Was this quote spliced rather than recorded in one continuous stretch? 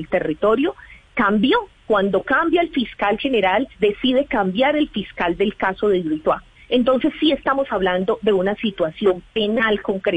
yes; 2 cuts; at 3.7 s, 6.6 s

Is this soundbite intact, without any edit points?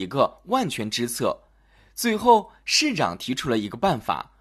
yes; 0 cuts

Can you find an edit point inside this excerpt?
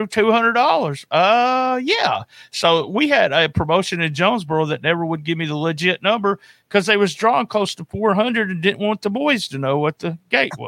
no; 0 cuts

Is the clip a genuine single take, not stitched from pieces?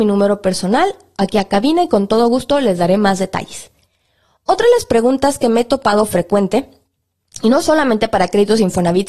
yes; 0 cuts

